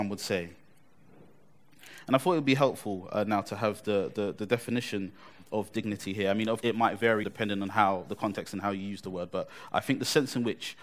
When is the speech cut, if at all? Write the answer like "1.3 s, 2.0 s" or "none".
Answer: 6.6 s, 7.2 s